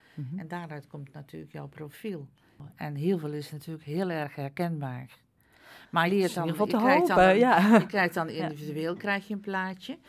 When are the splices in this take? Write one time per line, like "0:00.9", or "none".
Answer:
0:06.1